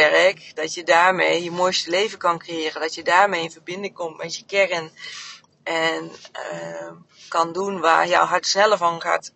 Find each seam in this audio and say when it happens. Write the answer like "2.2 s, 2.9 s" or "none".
none